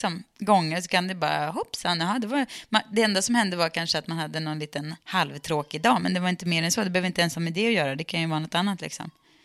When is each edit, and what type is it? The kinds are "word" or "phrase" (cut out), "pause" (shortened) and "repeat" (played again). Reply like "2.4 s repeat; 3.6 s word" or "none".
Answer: 5.0 s pause